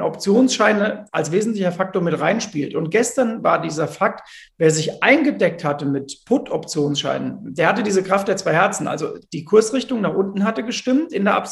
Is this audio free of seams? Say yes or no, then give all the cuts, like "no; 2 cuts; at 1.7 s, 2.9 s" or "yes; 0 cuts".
yes; 0 cuts